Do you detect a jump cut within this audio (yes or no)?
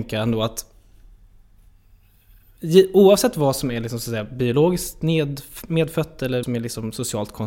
yes